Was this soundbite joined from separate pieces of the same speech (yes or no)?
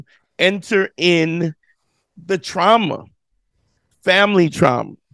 no